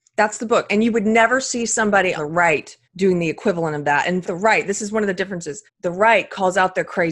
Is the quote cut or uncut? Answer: cut